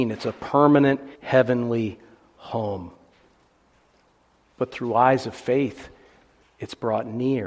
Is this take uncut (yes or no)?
no